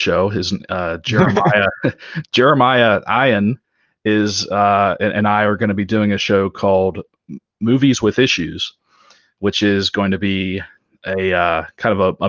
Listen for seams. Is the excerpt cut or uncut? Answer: uncut